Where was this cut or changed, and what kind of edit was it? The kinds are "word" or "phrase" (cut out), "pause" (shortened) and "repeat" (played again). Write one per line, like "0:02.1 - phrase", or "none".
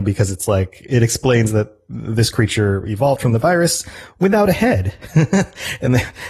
none